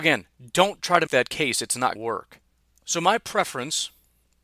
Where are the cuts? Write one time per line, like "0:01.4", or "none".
0:01.1
0:02.0